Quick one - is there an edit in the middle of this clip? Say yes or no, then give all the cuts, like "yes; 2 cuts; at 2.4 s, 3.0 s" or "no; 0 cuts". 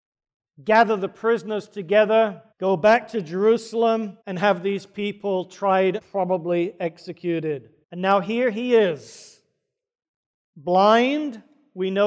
yes; 4 cuts; at 2.5 s, 4.2 s, 6.0 s, 7.8 s